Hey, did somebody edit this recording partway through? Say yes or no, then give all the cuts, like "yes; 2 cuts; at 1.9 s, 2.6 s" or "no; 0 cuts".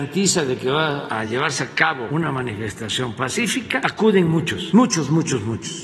no; 0 cuts